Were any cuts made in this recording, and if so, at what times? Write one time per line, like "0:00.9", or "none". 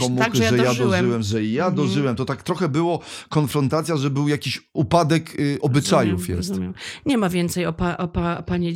none